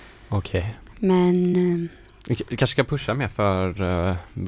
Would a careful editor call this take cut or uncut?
uncut